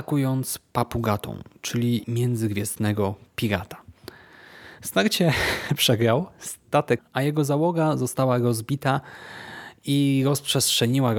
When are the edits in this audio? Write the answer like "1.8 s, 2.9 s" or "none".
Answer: 2.0 s, 7.0 s